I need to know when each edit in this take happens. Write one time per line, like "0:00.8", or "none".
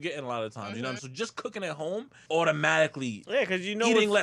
0:01.0
0:02.3